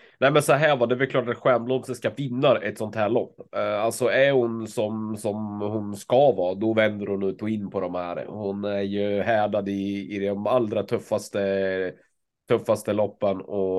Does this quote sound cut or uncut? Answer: uncut